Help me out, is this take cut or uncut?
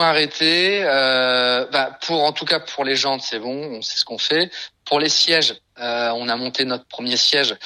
cut